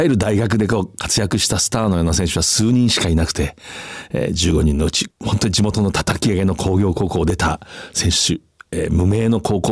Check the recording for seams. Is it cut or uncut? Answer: uncut